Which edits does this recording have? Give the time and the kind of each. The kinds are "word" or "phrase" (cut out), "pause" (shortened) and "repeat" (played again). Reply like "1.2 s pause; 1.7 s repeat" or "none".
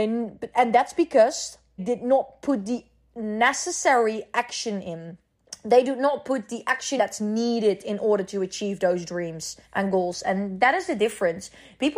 1.8 s word; 7.0 s word; 9.6 s pause